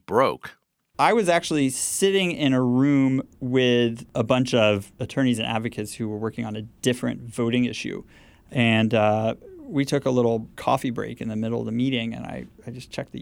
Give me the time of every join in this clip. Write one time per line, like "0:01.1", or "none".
0:04.9
0:10.5